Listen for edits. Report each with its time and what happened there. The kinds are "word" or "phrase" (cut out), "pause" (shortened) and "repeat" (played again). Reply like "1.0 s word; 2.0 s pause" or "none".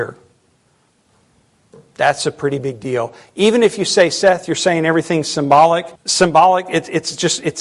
6.0 s pause